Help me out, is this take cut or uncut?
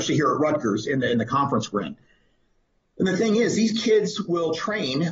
uncut